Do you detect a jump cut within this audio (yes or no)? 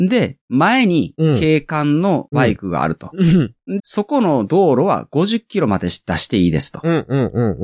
yes